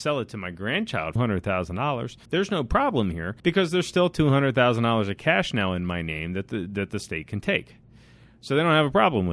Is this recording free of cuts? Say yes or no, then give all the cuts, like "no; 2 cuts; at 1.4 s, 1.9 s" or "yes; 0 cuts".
no; 3 cuts; at 1.2 s, 2.3 s, 3.4 s